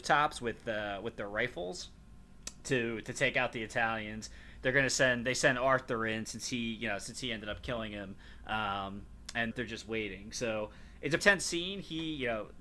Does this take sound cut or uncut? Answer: cut